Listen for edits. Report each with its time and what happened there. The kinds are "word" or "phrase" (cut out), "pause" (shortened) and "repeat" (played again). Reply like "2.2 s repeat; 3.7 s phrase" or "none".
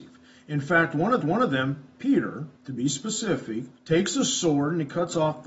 1.2 s repeat; 2.6 s pause; 3.8 s pause